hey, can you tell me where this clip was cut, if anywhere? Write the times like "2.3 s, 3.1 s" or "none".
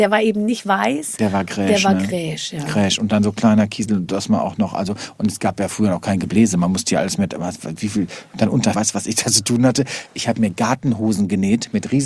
8.7 s